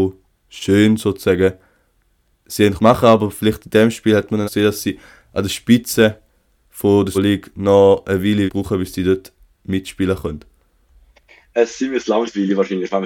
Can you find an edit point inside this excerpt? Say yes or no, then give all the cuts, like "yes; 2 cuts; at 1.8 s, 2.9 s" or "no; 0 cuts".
yes; 5 cuts; at 2.4 s, 2.8 s, 4.4 s, 7.1 s, 8.5 s